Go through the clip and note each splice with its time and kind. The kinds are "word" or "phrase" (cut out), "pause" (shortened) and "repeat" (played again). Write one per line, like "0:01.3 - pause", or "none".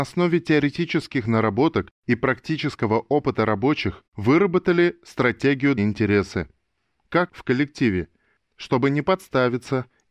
0:02.0 - pause
0:04.1 - pause
0:05.8 - phrase
0:07.3 - phrase

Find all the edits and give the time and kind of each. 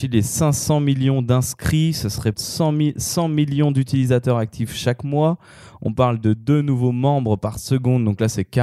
0:02.3 - word

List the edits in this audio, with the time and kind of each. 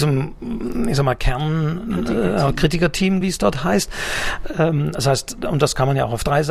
0:03.2 - word

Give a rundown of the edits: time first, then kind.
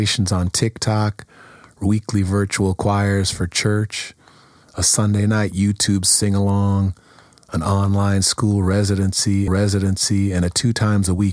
0:09.5 - repeat

